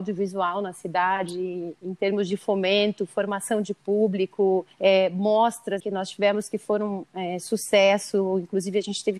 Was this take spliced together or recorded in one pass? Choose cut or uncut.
cut